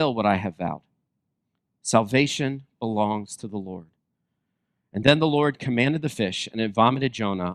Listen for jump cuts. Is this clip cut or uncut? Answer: uncut